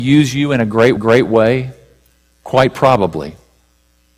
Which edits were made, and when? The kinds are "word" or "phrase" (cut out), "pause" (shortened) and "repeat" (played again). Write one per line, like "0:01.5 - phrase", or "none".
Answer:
0:01.0 - repeat

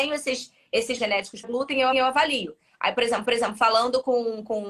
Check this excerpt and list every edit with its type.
0:01.0 - word
0:01.4 - word
0:01.9 - repeat
0:03.2 - repeat

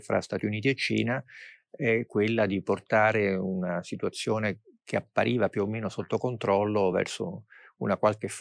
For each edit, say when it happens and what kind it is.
none

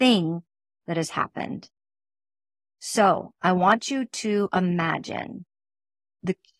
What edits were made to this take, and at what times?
none

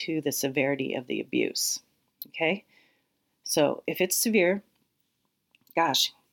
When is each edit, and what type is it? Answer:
none

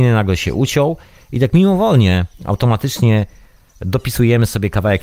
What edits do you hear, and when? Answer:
0:02.3 - pause

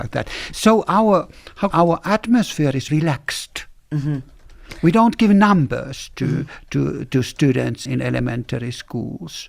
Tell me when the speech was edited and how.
0:01.7 - phrase
0:02.9 - word
0:07.9 - word

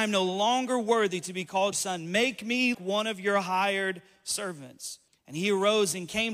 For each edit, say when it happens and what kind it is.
0:01.7 - word
0:02.7 - word
0:05.1 - pause

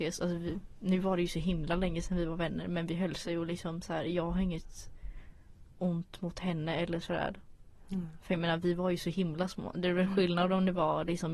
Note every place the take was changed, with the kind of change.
none

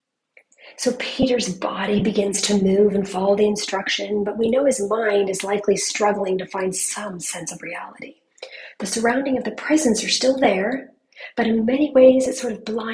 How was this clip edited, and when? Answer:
none

